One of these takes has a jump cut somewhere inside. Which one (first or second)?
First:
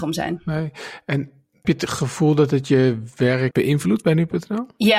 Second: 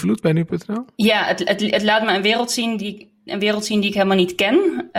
first